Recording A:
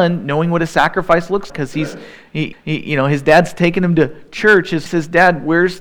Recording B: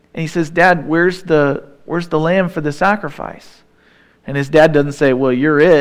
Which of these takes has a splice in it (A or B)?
A